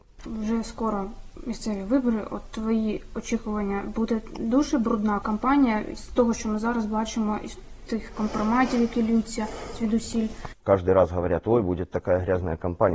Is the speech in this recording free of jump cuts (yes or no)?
yes